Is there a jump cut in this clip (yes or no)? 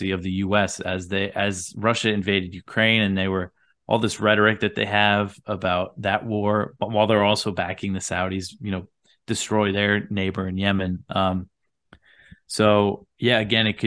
no